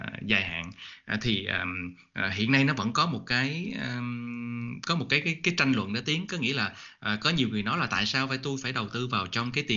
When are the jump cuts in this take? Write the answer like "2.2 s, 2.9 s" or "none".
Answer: none

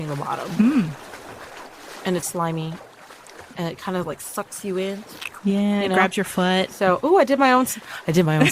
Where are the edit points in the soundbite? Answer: 2.2 s

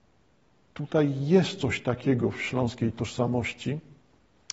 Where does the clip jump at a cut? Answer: none

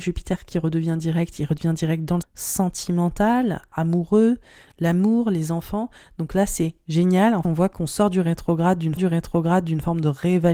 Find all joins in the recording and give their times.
2.2 s, 7.4 s, 9.0 s

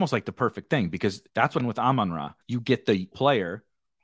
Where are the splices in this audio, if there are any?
1.3 s, 1.6 s, 2.4 s, 3.1 s

